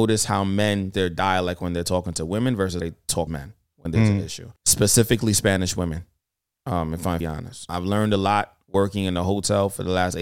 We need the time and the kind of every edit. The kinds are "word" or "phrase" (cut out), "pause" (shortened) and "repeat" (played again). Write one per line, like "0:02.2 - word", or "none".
0:00.9 - word
0:02.8 - word
0:03.3 - word
0:04.6 - pause
0:07.2 - phrase
0:07.7 - word